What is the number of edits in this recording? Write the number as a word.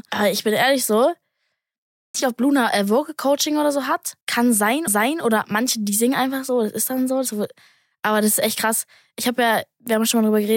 three